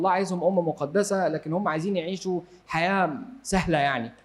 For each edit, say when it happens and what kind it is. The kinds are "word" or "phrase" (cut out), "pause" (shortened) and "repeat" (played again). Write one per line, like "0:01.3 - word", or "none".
none